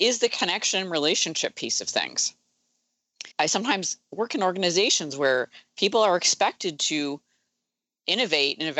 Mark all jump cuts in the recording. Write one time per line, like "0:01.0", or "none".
0:03.3
0:04.0